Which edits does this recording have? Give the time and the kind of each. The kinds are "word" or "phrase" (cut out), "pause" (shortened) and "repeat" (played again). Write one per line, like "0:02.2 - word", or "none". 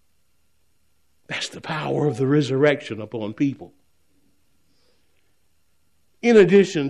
none